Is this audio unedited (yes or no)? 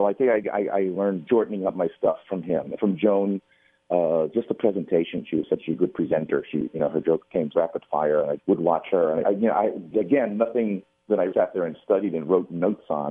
no